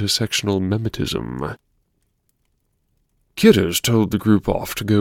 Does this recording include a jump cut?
no; 0 cuts

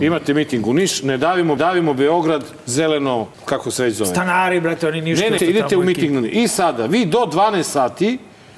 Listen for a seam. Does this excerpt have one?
yes; 3 cuts; at 1.6 s, 3.3 s, 5.4 s

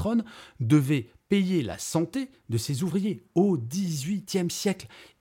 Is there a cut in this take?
no; 0 cuts

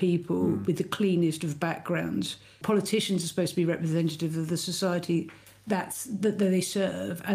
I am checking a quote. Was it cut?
no; 0 cuts

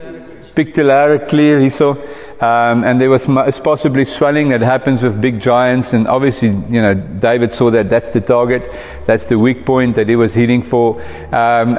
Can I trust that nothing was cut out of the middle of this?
yes; 0 cuts

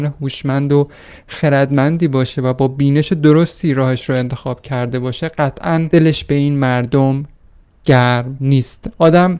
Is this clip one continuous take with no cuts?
yes; 0 cuts

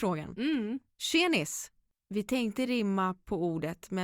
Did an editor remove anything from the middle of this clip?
no; 0 cuts

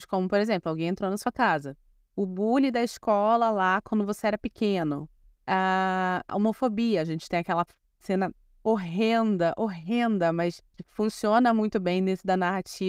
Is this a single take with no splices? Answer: yes; 0 cuts

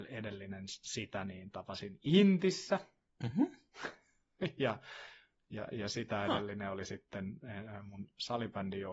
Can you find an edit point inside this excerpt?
no; 0 cuts

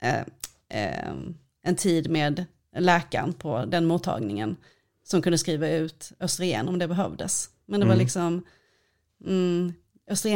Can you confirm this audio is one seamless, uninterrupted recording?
yes; 0 cuts

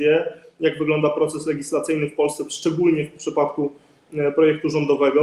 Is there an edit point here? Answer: no; 0 cuts

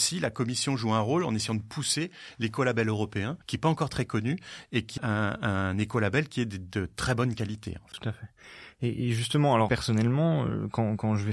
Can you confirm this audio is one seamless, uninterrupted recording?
no; 2 cuts; at 3.4 s, 5.0 s

